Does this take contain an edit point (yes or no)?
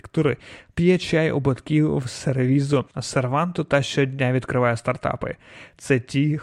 yes